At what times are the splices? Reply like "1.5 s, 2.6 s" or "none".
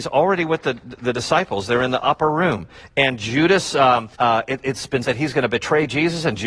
4.1 s, 5.0 s